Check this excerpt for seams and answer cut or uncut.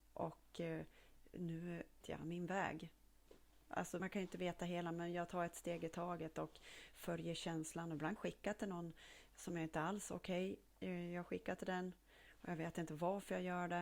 cut